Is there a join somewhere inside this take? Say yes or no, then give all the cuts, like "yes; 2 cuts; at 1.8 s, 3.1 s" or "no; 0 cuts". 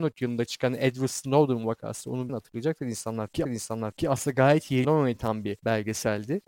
yes; 3 cuts; at 2.3 s, 3.4 s, 4.8 s